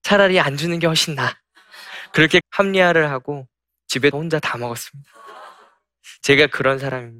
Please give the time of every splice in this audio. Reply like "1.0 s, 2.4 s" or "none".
2.4 s, 4.1 s